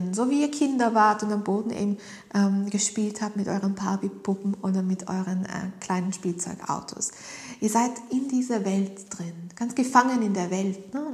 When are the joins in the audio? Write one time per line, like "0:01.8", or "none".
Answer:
none

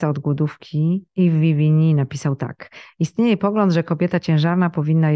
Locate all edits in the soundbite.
0:01.1

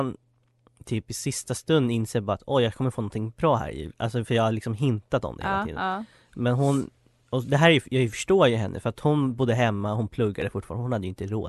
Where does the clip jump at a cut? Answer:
none

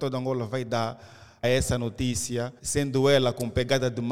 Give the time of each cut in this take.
0:01.4
0:02.6

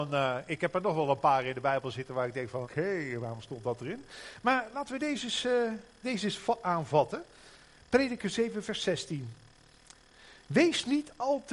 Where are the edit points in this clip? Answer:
0:02.6
0:06.0

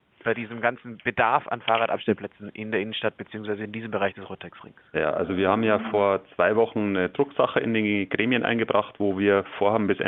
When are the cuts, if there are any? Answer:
0:04.9

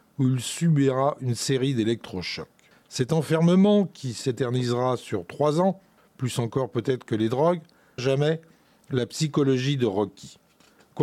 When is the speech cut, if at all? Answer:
0:08.0

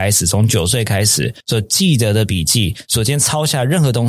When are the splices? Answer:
0:01.4

